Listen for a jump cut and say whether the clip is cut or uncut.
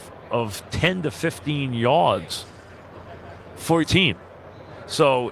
cut